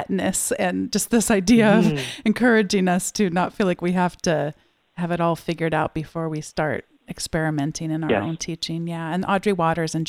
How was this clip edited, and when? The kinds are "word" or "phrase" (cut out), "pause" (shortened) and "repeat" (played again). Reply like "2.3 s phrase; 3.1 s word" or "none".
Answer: none

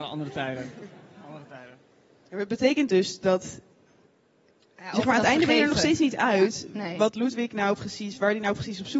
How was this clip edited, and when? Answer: none

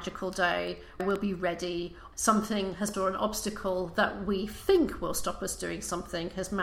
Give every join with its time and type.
1.0 s word; 2.1 s word; 2.9 s word

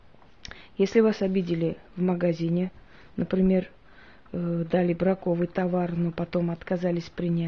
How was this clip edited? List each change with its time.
none

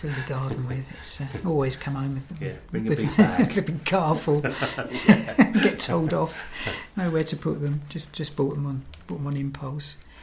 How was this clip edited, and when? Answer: none

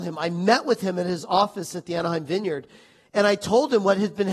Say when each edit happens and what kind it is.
none

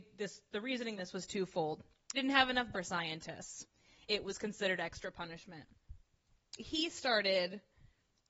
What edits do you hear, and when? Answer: 1.0 s word; 2.1 s word; 2.7 s word; 4.0 s word; 6.6 s word

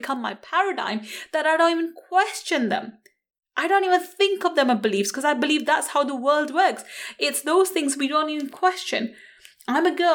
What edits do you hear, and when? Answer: none

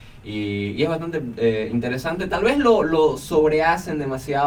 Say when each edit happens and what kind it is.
none

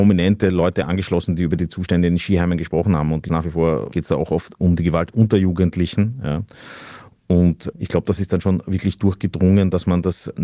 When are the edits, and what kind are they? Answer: none

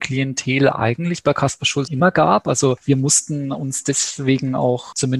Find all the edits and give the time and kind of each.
1.9 s word

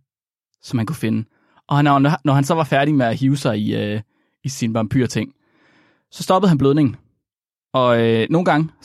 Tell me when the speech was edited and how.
none

